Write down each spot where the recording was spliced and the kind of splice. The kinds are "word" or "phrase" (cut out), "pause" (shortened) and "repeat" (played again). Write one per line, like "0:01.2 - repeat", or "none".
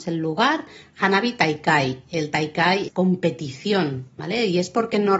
0:02.9 - word

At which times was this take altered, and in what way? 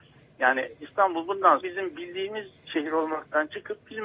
0:01.6 - word

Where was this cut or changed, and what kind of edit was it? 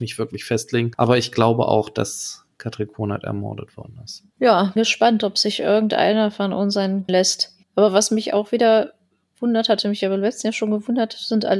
0:04.8 - word
0:07.1 - phrase
0:07.6 - pause

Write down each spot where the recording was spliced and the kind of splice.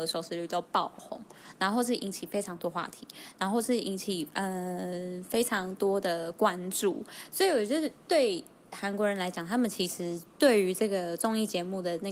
none

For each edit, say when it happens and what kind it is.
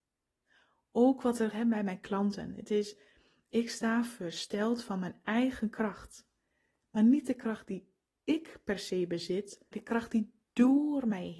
0:01.5 - word
0:09.7 - word

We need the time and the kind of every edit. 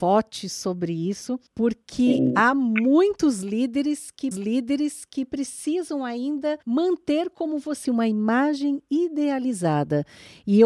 0:01.5 - pause
0:04.3 - repeat
0:06.6 - pause
0:07.8 - phrase

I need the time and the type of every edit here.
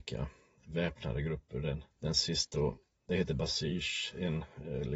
0:01.9 - pause
0:02.5 - word

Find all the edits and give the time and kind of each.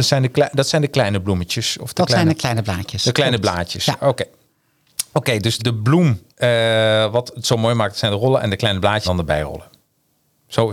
0:05.6 - word
0:06.3 - pause
0:09.0 - word

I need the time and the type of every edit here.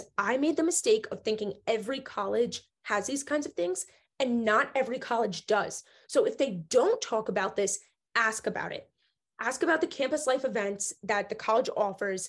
none

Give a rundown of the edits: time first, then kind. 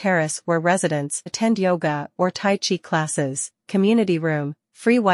0:01.3 - word

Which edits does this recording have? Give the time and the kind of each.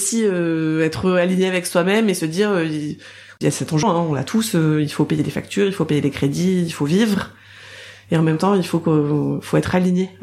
0:03.8 - word

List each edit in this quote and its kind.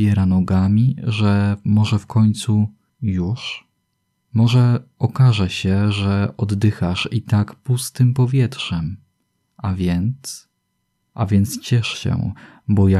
none

